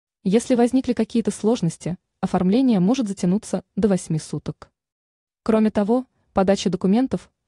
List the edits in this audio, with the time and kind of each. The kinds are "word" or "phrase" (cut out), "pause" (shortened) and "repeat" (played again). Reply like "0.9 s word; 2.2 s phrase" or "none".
none